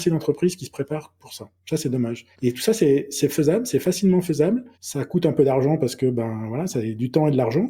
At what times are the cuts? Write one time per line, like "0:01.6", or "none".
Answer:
0:01.6
0:02.3
0:04.7